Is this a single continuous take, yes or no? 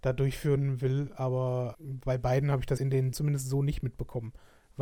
no